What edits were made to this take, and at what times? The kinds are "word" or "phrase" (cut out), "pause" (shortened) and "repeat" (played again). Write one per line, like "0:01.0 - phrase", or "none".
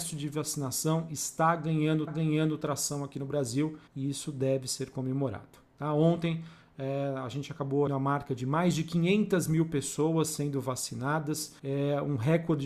0:02.1 - repeat
0:03.9 - pause
0:07.9 - word
0:11.6 - pause